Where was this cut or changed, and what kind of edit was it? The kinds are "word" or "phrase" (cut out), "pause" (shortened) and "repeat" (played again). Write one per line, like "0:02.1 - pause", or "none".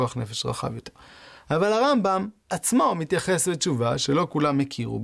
none